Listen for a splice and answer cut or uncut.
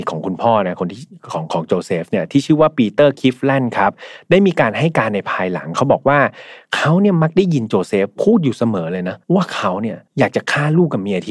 cut